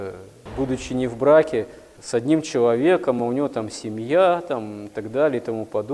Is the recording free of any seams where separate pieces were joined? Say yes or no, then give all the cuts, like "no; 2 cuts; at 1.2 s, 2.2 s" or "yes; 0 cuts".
yes; 0 cuts